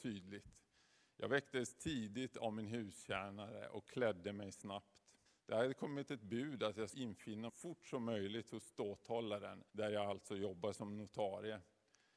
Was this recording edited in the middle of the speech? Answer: yes; 4 cuts; at 5.3 s, 6.9 s, 7.5 s, 9.7 s

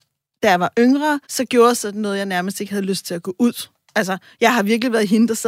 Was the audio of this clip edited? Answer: yes; 1 cut; at 1.2 s

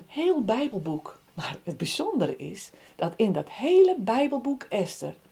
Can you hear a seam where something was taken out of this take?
yes; 1 cut; at 1.3 s

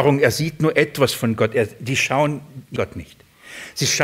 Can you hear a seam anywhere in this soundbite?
yes; 1 cut; at 2.8 s

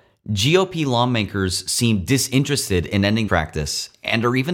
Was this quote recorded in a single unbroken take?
no; 1 cut; at 3.3 s

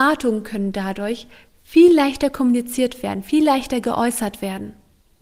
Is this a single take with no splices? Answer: yes; 0 cuts

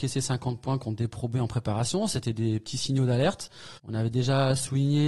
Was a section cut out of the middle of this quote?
yes; 1 cut; at 3.8 s

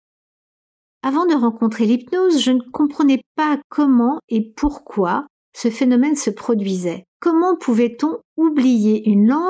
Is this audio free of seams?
no; 1 cut; at 7.1 s

